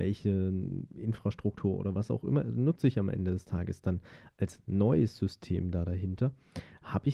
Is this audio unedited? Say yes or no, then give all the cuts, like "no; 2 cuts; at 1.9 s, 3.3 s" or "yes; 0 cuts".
yes; 0 cuts